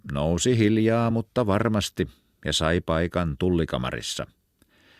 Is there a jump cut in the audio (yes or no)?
no